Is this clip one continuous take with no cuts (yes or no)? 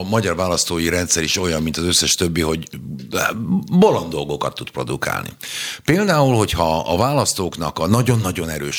yes